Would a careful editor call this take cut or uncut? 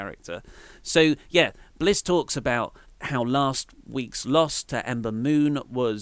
cut